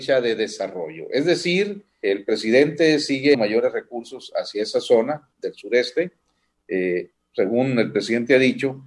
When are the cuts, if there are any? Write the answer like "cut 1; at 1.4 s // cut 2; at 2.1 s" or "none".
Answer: cut 1; at 2.0 s // cut 2; at 3.3 s